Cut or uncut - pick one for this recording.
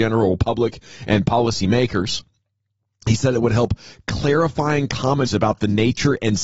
cut